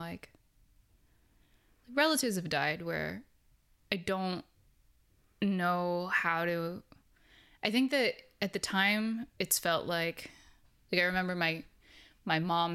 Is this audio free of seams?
yes; 0 cuts

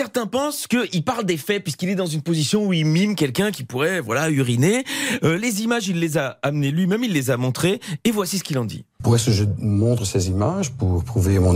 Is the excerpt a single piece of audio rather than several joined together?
no; 1 cut; at 8.9 s

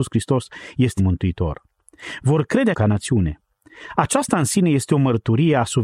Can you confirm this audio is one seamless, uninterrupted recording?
no; 2 cuts; at 1.0 s, 2.7 s

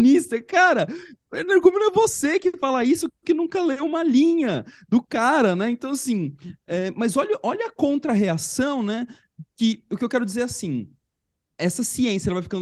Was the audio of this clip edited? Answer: no; 0 cuts

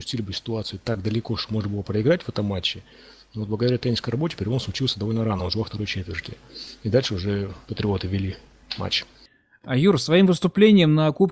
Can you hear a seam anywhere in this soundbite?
no; 0 cuts

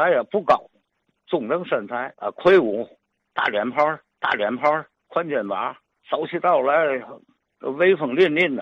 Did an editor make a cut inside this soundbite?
yes; 3 cuts; at 2.1 s, 4.1 s, 5.9 s

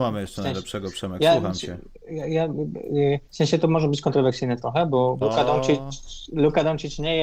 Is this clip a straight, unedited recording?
no; 2 cuts; at 3.3 s, 5.2 s

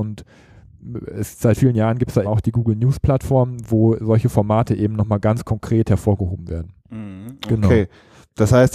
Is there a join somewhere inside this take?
yes; 3 cuts; at 1.6 s, 2.2 s, 6.8 s

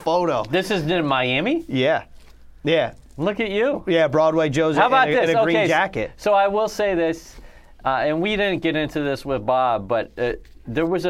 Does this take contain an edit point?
no; 0 cuts

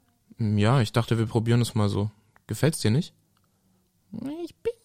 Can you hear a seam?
no; 0 cuts

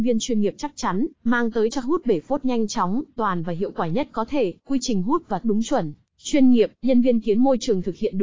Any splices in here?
yes; 6 cuts; at 1.1 s, 1.8 s, 3.2 s, 4.6 s, 5.4 s, 6.7 s

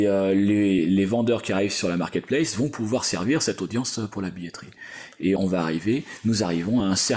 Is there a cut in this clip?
yes; 1 cut; at 5.4 s

